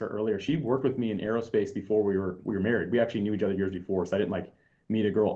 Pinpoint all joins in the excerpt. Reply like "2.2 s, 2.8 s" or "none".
none